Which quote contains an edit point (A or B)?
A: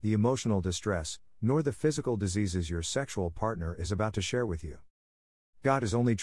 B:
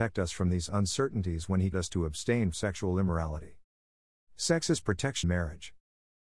B